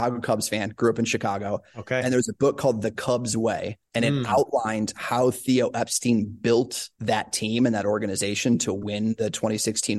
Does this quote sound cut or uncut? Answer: cut